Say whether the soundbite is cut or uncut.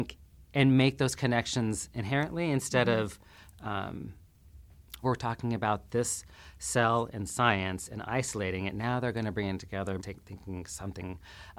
cut